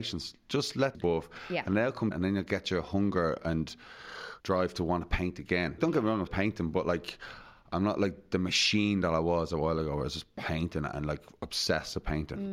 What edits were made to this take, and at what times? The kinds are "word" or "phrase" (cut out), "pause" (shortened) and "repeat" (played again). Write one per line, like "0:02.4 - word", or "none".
0:00.9 - phrase
0:02.1 - word
0:04.4 - pause
0:05.8 - word
0:06.3 - word